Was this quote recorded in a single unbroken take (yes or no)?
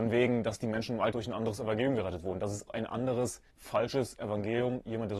no